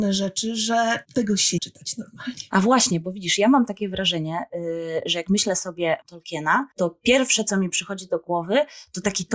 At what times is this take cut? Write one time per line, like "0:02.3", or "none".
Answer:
0:01.0
0:01.6
0:06.0
0:06.7